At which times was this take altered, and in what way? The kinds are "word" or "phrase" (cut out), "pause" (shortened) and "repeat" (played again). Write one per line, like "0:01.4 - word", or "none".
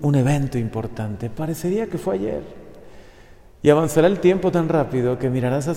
none